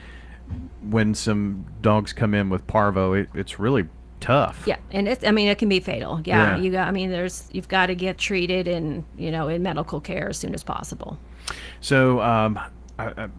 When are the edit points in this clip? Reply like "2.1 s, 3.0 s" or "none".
3.3 s, 4.2 s, 8.2 s

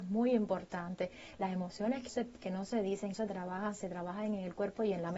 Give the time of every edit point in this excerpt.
2.1 s, 3.1 s

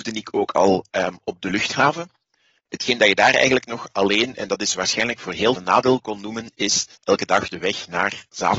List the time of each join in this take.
5.6 s, 7.0 s

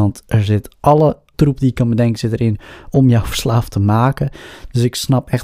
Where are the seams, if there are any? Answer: 1.3 s

